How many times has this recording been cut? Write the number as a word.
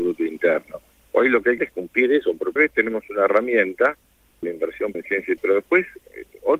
five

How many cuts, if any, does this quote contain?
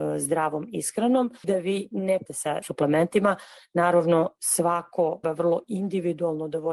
four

